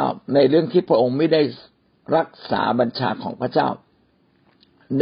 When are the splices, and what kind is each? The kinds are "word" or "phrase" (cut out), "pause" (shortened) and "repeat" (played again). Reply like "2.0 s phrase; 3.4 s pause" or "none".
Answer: none